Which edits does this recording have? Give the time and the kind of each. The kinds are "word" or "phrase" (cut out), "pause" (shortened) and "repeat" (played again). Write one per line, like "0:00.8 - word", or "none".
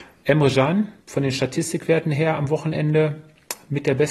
0:01.0 - pause